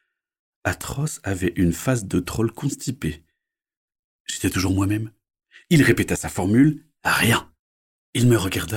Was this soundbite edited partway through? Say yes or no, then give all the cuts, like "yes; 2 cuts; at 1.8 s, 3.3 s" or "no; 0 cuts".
no; 0 cuts